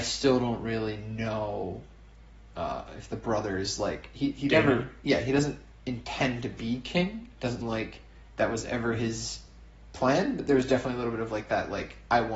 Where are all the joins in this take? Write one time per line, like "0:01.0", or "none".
0:07.6